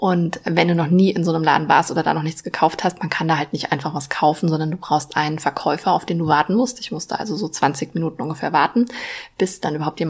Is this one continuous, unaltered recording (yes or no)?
yes